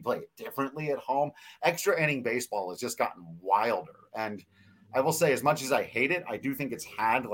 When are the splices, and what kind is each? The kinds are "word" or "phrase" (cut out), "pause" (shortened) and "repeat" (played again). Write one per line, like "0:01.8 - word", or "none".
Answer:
none